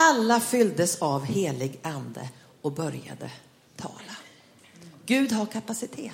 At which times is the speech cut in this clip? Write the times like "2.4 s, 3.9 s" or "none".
none